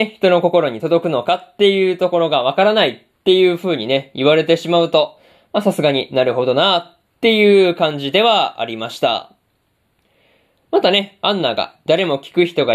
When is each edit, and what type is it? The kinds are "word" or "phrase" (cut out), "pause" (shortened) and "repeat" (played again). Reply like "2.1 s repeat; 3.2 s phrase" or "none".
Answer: none